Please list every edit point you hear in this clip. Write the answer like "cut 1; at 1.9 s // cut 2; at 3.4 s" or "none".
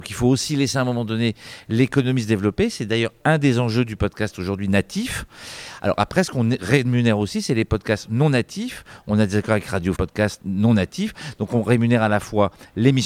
cut 1; at 3.2 s // cut 2; at 9.9 s